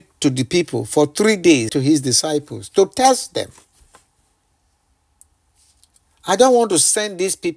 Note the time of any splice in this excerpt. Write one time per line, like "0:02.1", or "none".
0:01.7

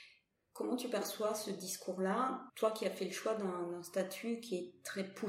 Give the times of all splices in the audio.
0:02.5

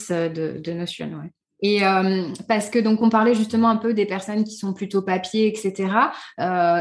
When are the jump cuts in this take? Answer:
none

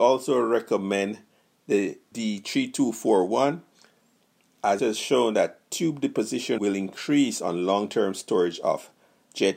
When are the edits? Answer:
0:02.1
0:04.8
0:06.6

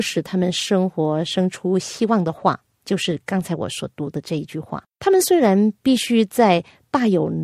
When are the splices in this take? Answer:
0:04.9

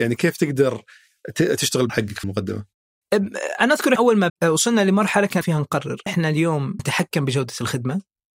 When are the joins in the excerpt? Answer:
0:01.9
0:02.2
0:04.0
0:04.3
0:05.4
0:06.1
0:06.8

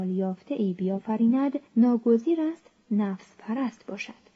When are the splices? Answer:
0:01.7

